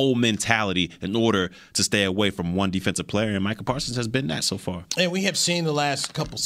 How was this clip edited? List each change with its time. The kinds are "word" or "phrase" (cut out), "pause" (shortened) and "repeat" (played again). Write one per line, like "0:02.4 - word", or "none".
none